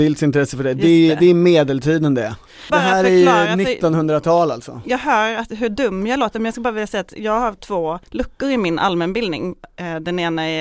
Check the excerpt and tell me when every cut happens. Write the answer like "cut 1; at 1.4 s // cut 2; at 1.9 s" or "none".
cut 1; at 2.7 s // cut 2; at 8.0 s

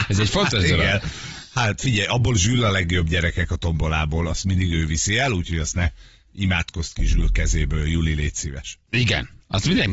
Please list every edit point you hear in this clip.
none

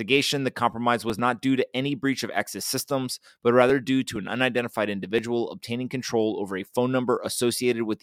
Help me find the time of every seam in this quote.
none

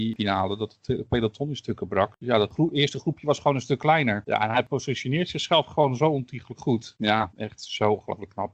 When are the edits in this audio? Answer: cut 1; at 7.3 s

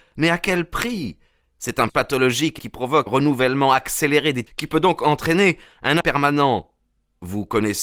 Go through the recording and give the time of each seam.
cut 1; at 1.9 s // cut 2; at 2.6 s // cut 3; at 3.1 s // cut 4; at 4.5 s // cut 5; at 6.0 s

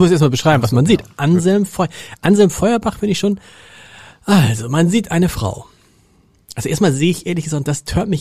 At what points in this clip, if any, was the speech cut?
none

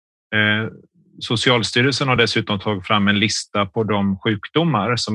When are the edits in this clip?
none

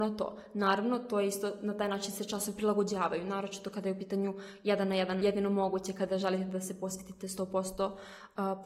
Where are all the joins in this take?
cut 1; at 5.2 s

